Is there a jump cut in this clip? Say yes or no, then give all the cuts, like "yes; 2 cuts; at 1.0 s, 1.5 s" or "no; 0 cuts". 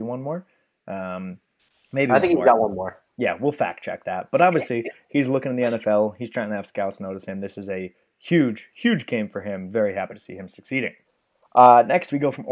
no; 0 cuts